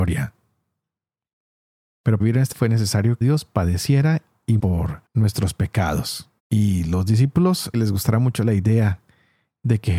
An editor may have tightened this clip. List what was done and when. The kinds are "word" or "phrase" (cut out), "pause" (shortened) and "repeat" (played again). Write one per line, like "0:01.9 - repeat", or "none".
0:02.2 - word
0:02.5 - word
0:03.2 - phrase
0:04.6 - word
0:05.1 - pause
0:06.4 - pause
0:07.7 - phrase

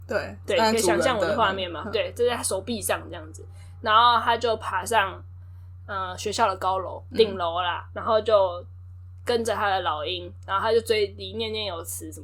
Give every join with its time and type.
0:07.9 - word

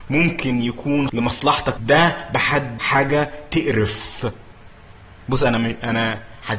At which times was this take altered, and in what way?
0:01.1 - word
0:01.8 - word
0:02.8 - word

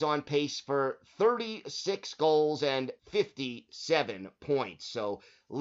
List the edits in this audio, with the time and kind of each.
0:03.0 - pause

